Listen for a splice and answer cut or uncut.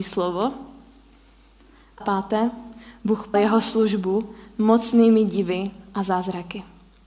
cut